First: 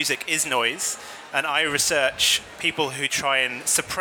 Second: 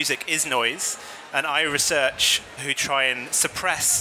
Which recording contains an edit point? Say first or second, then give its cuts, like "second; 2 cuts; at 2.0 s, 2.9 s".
second; 1 cut; at 2.6 s